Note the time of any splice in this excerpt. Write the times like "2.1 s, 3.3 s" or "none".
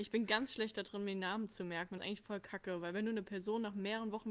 2.0 s